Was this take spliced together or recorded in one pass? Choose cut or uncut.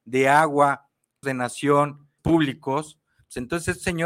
cut